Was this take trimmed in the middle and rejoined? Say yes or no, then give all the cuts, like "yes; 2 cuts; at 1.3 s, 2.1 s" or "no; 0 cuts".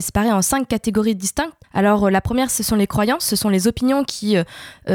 yes; 1 cut; at 1.6 s